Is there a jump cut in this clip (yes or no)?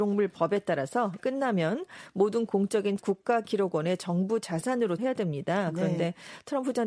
yes